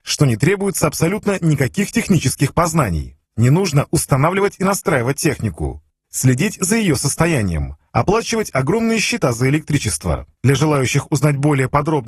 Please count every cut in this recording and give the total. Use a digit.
3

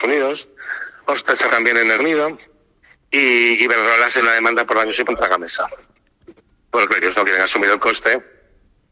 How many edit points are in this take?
6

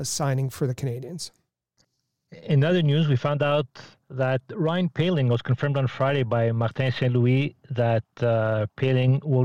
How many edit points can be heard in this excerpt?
0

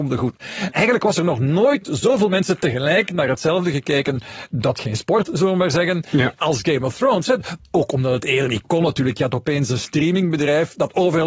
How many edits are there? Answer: 1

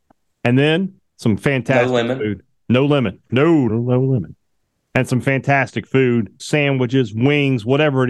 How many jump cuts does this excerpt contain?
2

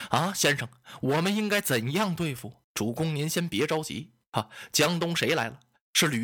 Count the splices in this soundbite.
1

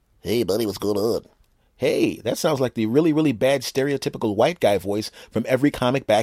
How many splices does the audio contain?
0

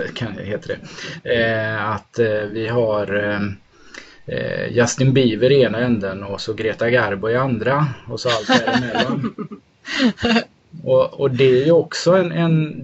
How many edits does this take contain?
0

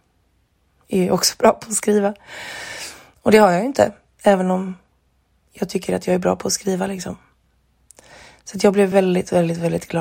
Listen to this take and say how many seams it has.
0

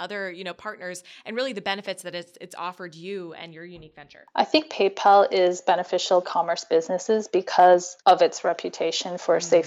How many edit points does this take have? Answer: 2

